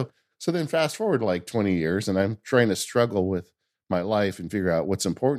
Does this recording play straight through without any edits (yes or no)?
yes